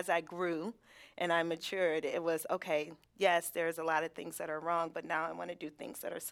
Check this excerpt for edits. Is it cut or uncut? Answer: uncut